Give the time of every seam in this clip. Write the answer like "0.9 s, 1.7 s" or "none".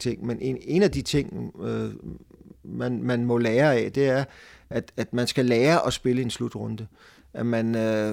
none